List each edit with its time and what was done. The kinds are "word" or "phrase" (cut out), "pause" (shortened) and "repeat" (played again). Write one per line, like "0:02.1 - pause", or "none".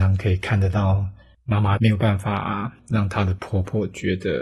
none